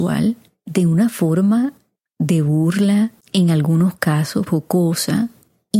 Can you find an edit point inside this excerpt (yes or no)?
yes